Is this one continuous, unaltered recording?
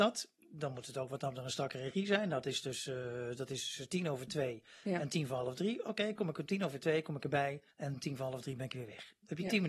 no; 1 cut; at 7.7 s

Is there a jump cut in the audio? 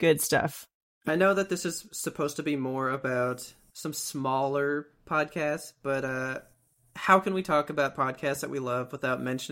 no; 0 cuts

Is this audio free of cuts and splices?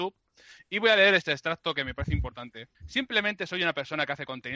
no; 1 cut; at 2.7 s

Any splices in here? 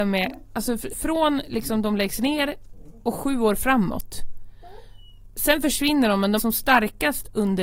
yes; 2 cuts; at 0.9 s, 6.4 s

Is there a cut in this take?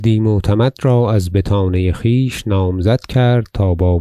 no; 0 cuts

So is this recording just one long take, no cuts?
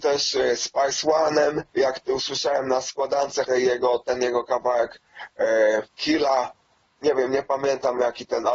no; 3 cuts; at 1.7 s, 3.4 s, 5.9 s

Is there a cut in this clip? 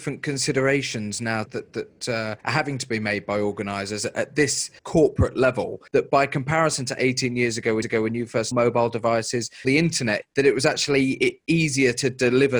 yes; 8 cuts; at 1.4 s, 2.4 s, 4.8 s, 5.9 s, 7.8 s, 8.5 s, 9.6 s, 10.2 s

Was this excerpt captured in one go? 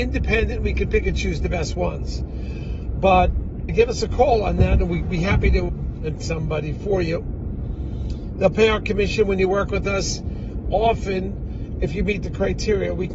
no; 3 cuts; at 3.7 s, 5.7 s, 6.2 s

